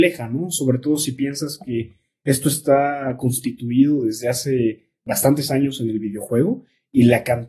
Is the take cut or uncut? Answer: uncut